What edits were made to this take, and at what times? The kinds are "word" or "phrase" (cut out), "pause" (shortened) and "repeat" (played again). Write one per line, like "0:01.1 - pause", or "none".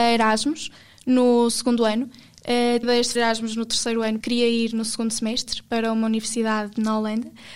0:02.8 - word
0:03.2 - word
0:04.2 - word